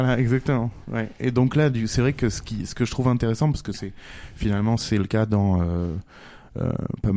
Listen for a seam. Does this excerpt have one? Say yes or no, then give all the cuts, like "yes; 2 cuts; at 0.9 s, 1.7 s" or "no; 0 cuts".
no; 0 cuts